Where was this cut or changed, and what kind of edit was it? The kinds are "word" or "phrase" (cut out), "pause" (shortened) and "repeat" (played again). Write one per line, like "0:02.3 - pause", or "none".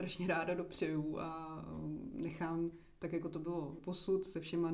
0:03.8 - word